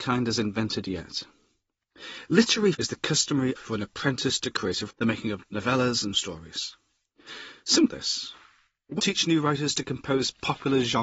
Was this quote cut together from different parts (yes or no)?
yes